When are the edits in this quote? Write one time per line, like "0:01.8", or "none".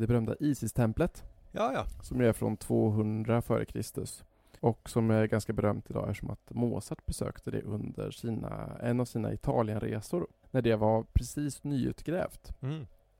0:04.6
0:10.4

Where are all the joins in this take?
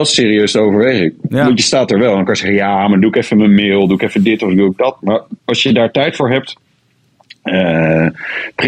0:05.4

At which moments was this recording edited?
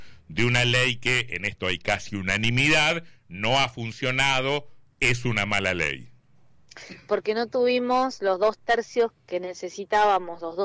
none

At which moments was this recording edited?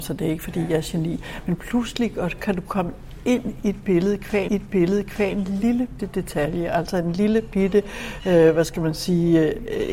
0:04.5
0:06.0

